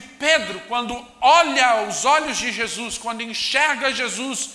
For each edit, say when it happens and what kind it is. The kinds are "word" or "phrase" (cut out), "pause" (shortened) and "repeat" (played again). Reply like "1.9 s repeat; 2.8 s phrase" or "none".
none

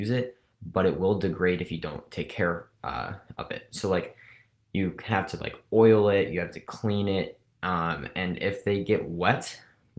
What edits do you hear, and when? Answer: none

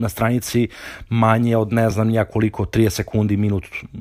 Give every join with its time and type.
none

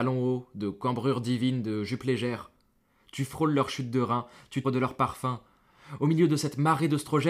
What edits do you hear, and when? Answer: 4.6 s word

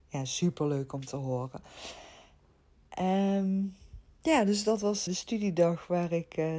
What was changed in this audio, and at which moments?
5.1 s word

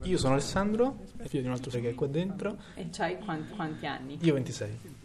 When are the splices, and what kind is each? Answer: 1.2 s word; 1.7 s word; 3.5 s repeat

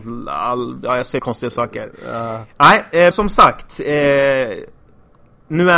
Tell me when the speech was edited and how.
1.2 s word; 3.1 s word

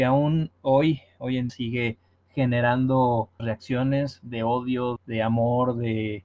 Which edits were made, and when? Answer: 1.5 s word; 3.4 s word; 5.0 s word

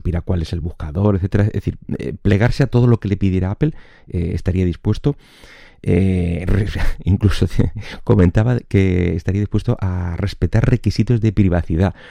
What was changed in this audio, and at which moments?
none

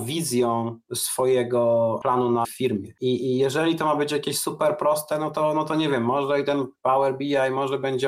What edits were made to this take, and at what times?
2.4 s phrase

